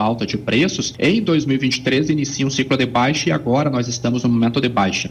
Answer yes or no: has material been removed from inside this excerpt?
no